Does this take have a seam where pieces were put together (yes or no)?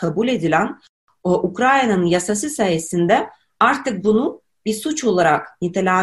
no